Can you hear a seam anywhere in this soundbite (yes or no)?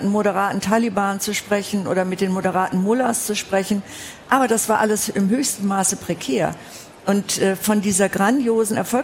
no